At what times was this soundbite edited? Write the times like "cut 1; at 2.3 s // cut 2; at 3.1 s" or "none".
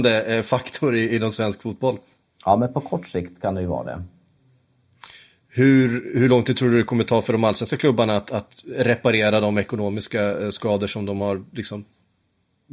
none